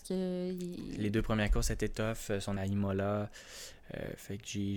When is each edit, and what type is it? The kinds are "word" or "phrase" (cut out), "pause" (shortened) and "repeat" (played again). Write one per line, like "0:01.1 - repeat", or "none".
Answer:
0:02.6 - word

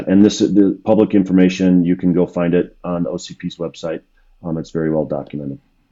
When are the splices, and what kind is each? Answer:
none

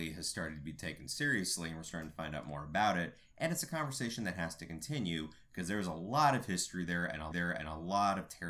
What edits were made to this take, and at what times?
0:07.3 - repeat

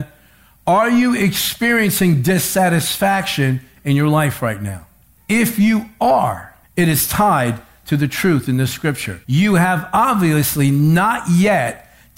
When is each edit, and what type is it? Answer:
0:05.2 - pause
0:06.6 - pause
0:09.2 - pause

